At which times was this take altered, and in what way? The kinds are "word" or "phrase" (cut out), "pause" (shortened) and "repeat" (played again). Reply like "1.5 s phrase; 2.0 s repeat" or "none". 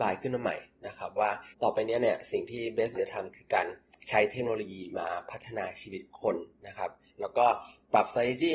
1.5 s pause; 2.9 s word; 6.5 s pause

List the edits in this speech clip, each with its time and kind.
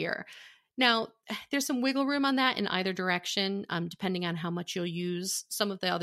none

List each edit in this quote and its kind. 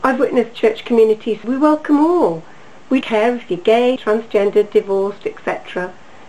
1.4 s word; 3.0 s word; 4.0 s word

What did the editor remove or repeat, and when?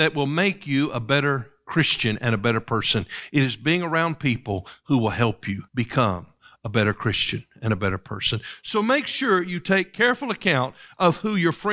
5.7 s pause

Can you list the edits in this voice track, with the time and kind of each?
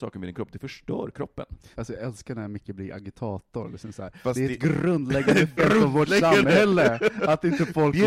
1.7 s pause; 5.6 s word

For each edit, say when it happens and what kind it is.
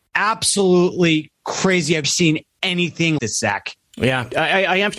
2.0 s word; 3.2 s word

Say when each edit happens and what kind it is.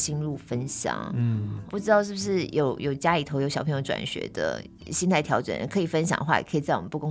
1.7 s word

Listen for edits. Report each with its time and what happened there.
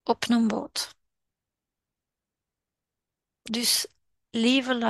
none

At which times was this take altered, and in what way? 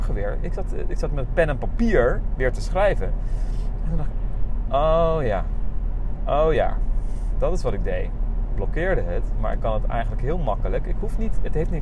none

